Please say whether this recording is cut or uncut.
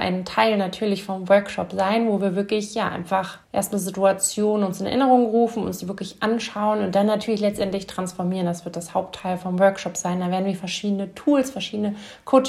cut